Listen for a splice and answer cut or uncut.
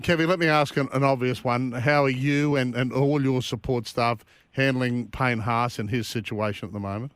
uncut